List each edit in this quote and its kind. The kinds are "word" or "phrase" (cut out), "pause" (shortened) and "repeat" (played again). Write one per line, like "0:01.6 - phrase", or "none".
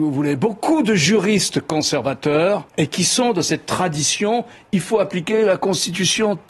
0:02.7 - pause